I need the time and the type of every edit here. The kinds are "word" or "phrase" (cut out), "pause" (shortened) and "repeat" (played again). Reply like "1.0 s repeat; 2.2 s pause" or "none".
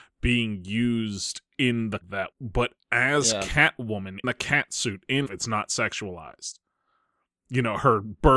2.0 s word; 2.3 s word; 4.2 s word; 5.3 s phrase